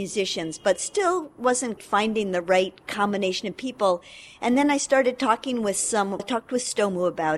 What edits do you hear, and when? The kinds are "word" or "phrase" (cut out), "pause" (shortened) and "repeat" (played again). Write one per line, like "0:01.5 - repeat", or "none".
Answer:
0:01.8 - word
0:06.2 - word